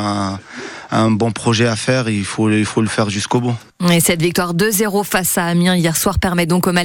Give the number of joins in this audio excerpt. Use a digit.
0